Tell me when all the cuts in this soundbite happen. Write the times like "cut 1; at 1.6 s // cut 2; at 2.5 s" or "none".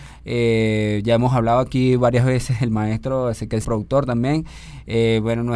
cut 1; at 3.6 s